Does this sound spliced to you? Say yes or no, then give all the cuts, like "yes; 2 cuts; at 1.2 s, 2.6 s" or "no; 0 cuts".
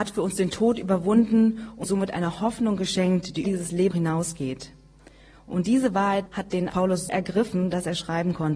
yes; 6 cuts; at 1.8 s, 3.4 s, 3.9 s, 6.3 s, 6.7 s, 7.1 s